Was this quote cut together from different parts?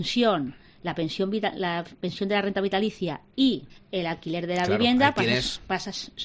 yes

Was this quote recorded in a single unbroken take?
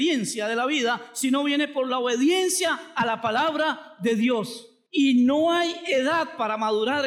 yes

